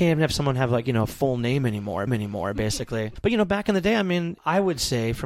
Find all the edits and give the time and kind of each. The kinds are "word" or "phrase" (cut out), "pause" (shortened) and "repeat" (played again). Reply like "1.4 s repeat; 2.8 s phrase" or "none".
2.1 s repeat